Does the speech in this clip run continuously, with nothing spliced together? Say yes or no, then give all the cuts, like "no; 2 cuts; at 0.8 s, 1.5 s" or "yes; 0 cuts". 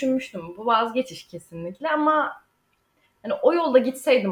yes; 0 cuts